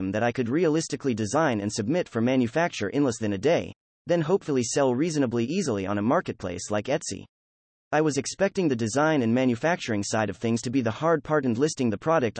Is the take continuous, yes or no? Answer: yes